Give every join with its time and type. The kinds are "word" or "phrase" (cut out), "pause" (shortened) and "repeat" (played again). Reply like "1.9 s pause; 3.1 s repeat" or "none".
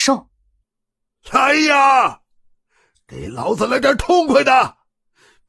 none